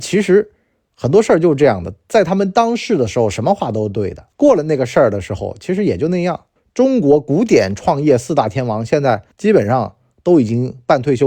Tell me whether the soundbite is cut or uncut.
cut